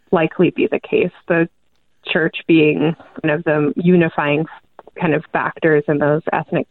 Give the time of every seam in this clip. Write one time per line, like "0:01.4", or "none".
0:03.2